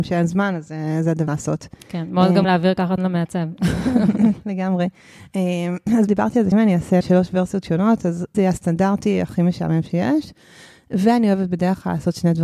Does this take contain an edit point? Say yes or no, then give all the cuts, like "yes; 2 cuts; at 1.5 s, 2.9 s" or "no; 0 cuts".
yes; 7 cuts; at 1.3 s, 2.4 s, 3.0 s, 6.1 s, 6.5 s, 7.0 s, 8.3 s